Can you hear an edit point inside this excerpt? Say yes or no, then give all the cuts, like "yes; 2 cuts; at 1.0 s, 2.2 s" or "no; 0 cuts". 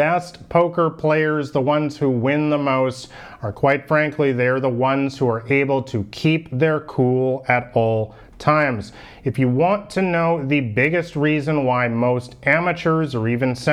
no; 0 cuts